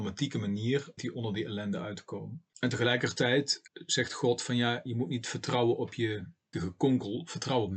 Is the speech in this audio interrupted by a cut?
yes; 4 cuts; at 1.0 s, 2.5 s, 3.7 s, 6.5 s

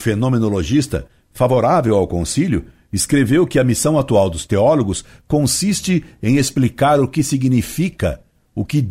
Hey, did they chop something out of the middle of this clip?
no; 0 cuts

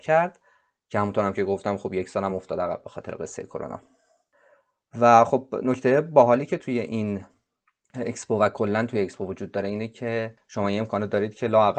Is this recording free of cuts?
yes; 0 cuts

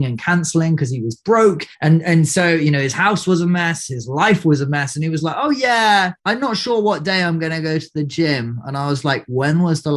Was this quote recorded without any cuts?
no; 2 cuts; at 1.7 s, 6.2 s

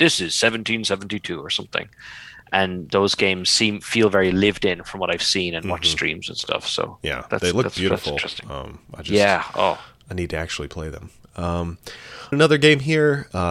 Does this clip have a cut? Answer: yes; 1 cut; at 12.3 s

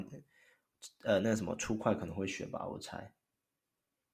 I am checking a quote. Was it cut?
no; 0 cuts

